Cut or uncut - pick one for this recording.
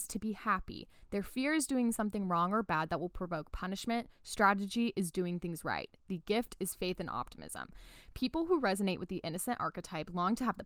uncut